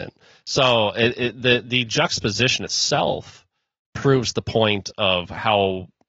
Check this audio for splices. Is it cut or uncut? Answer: uncut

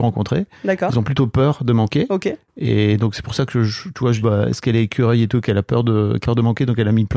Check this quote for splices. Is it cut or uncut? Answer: cut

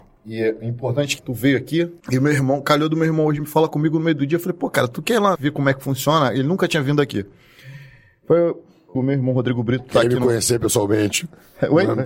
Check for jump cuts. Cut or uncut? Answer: cut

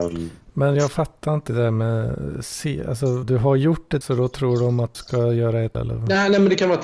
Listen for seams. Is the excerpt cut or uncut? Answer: cut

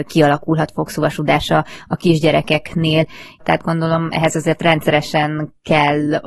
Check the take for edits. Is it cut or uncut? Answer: cut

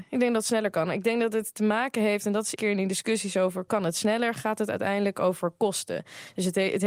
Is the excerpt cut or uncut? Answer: cut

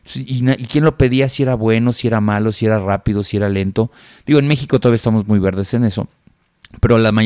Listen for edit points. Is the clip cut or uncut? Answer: uncut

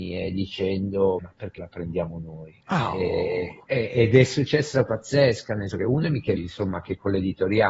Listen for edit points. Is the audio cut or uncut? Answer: cut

